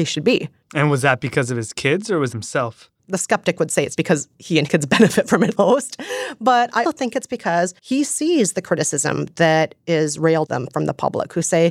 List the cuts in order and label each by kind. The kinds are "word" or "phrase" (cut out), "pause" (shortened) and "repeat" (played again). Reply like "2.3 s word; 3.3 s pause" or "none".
2.3 s phrase; 3.0 s pause; 3.9 s word; 4.7 s word; 5.6 s word; 6.8 s word; 7.8 s pause; 10.5 s word